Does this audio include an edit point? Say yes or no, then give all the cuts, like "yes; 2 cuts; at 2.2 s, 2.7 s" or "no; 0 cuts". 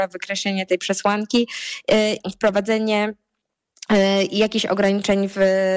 yes; 1 cut; at 2.2 s